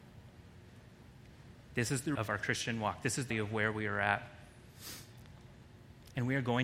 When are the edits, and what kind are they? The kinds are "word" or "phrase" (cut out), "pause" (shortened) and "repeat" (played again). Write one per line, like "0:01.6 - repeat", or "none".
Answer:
0:02.2 - word
0:03.3 - word